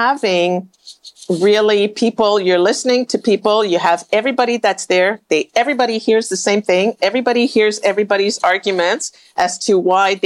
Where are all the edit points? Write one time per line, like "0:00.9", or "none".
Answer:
none